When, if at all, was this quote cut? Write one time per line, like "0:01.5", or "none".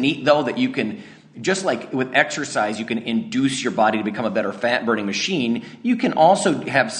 none